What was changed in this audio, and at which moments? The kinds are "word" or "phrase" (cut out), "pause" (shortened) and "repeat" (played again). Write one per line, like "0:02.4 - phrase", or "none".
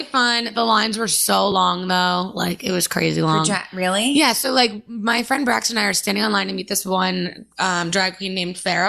none